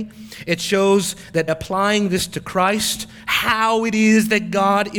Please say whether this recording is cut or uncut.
cut